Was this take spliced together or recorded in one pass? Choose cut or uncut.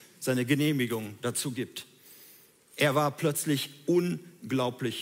uncut